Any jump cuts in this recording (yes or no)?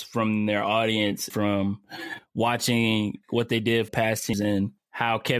yes